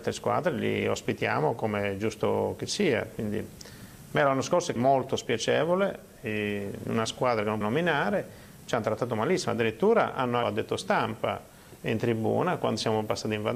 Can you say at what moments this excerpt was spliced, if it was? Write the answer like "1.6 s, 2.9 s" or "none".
4.8 s, 7.6 s, 10.4 s